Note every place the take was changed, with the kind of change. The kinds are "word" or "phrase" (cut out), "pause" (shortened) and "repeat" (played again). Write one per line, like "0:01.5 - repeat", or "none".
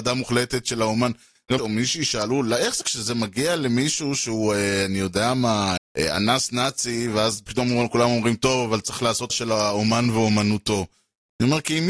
0:01.6 - word
0:02.8 - word
0:05.8 - word
0:09.3 - word